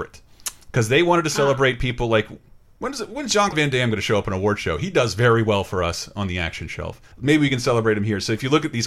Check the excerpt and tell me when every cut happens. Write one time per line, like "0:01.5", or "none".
0:03.5
0:07.1